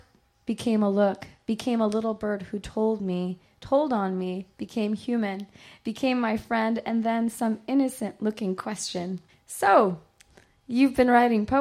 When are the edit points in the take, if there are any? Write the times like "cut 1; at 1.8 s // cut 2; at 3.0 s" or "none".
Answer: cut 1; at 9.3 s